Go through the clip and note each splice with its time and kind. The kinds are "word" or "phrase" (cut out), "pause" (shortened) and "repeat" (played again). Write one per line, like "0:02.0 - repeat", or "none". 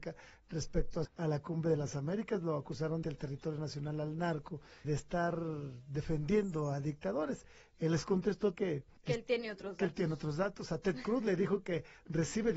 0:01.0 - phrase
0:03.0 - phrase
0:04.8 - word
0:08.5 - word
0:09.0 - pause